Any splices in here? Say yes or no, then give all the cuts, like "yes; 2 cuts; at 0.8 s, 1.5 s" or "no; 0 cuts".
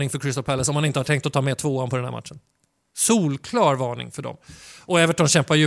no; 0 cuts